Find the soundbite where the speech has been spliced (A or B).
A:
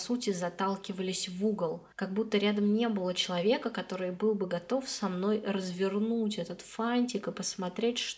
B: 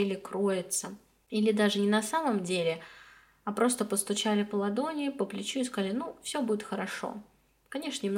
A